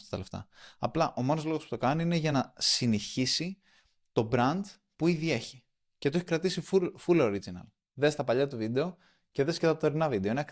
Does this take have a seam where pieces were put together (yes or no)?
no